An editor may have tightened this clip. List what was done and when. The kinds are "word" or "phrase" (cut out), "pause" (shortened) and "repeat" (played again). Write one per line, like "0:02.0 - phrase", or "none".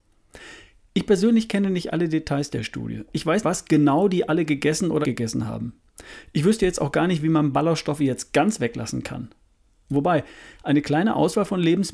0:03.4 - word
0:05.0 - word